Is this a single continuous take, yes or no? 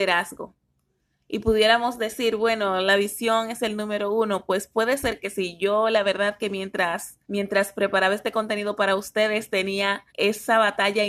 no